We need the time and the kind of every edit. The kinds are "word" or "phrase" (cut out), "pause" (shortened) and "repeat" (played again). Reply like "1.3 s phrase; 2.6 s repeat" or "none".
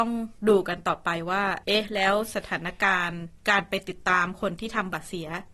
1.6 s pause; 3.4 s pause